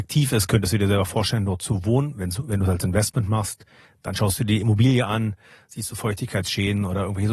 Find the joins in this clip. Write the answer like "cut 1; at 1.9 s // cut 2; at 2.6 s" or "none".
none